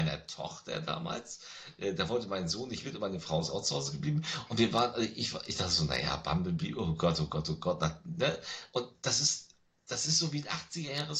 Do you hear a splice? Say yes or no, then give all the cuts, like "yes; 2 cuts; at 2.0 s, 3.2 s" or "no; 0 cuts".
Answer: no; 0 cuts